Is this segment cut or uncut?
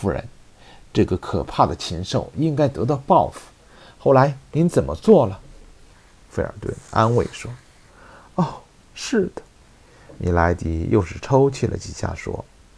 cut